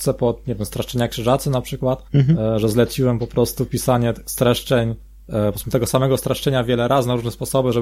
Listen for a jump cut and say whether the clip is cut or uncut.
cut